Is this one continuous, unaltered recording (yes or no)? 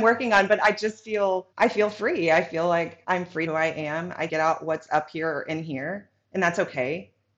no